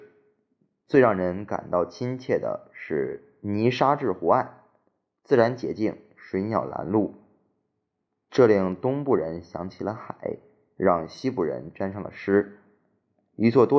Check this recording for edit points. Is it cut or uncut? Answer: uncut